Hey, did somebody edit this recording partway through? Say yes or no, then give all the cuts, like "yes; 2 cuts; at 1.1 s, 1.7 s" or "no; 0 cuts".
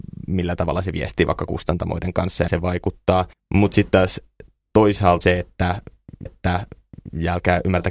yes; 4 cuts; at 2.5 s, 3.3 s, 5.2 s, 6.3 s